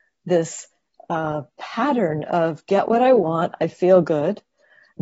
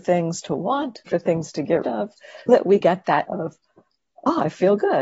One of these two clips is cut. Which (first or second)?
second